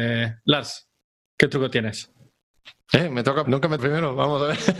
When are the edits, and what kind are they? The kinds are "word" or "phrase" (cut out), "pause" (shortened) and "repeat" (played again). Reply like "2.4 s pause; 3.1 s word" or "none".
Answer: 3.4 s word; 3.8 s word